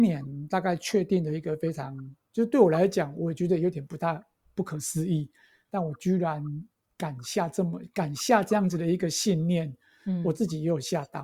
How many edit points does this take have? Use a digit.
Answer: 0